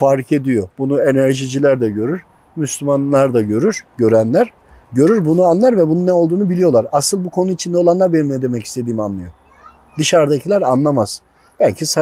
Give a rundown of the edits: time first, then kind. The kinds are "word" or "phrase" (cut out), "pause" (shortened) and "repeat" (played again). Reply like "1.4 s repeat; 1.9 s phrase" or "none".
none